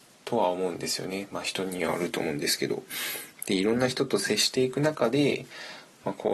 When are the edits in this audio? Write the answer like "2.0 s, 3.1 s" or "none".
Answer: none